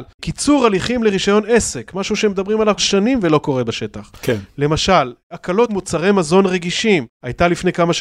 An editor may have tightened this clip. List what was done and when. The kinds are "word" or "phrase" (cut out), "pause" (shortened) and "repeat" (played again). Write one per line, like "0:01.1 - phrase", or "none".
0:02.8 - word
0:05.7 - word